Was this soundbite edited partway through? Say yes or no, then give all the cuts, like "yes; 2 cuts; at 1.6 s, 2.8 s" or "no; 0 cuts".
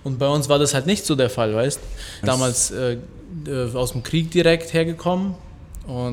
yes; 1 cut; at 2.2 s